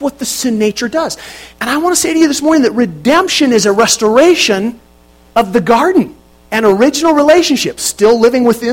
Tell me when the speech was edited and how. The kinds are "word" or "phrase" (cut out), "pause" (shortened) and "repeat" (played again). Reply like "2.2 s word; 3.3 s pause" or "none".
1.5 s pause; 6.3 s pause